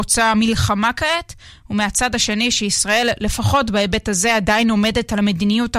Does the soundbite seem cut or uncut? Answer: uncut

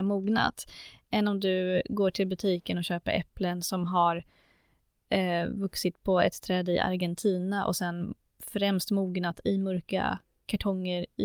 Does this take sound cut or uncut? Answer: uncut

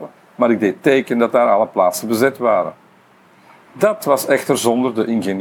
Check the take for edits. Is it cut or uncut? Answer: uncut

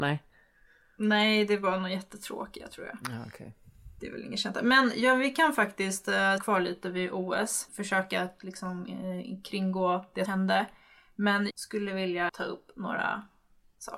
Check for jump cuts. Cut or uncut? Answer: cut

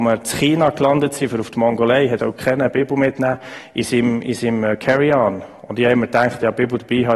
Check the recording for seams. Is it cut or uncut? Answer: cut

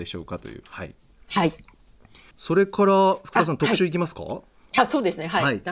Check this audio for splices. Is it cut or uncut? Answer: cut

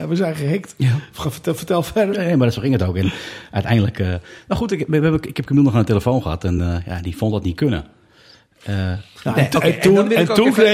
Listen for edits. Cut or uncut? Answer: uncut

